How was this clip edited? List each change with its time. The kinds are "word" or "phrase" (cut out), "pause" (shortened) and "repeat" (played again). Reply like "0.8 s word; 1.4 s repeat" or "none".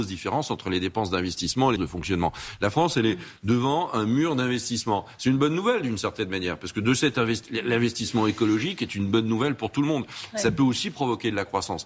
1.8 s phrase